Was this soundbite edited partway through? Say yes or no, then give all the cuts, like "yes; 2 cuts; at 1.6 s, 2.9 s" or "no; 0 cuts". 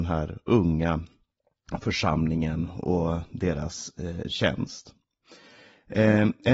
no; 0 cuts